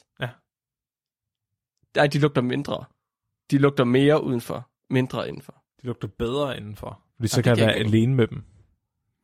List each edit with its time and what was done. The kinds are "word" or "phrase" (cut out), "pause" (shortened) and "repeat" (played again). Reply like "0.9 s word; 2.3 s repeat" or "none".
4.8 s pause; 7.1 s pause